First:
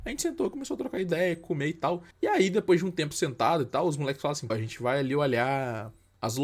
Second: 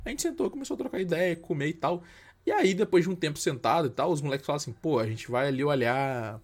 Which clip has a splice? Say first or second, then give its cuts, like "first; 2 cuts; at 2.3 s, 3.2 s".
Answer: first; 2 cuts; at 2.1 s, 4.5 s